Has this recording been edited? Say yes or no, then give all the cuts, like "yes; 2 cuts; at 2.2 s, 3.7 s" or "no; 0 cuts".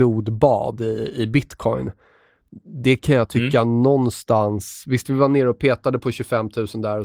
no; 0 cuts